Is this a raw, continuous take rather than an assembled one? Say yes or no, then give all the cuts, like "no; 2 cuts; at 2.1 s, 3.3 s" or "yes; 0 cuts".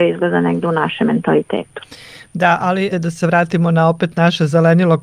no; 1 cut; at 2.9 s